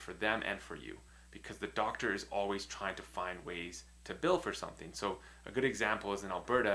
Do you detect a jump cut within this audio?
no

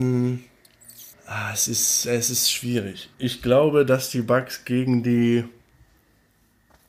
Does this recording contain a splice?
yes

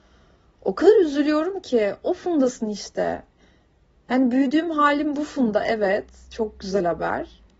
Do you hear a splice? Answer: no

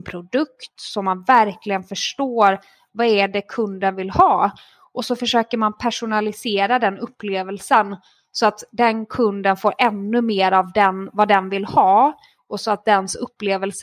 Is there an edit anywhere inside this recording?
no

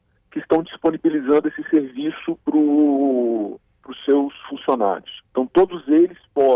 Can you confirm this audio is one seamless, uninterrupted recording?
no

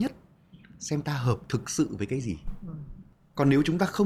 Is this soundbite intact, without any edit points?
yes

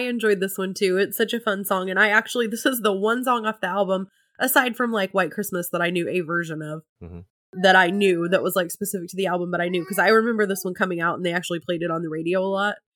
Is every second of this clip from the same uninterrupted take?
yes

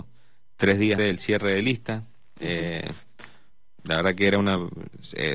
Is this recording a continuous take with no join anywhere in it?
no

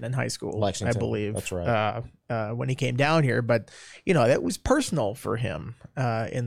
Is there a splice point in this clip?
no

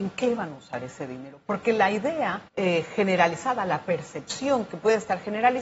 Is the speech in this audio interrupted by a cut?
yes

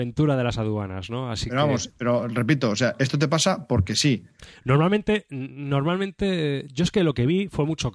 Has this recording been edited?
no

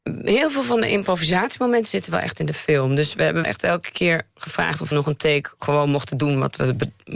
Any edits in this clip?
yes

